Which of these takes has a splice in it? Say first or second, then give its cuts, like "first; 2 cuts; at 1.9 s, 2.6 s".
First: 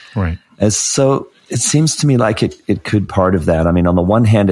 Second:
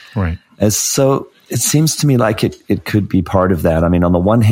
first; 1 cut; at 3.1 s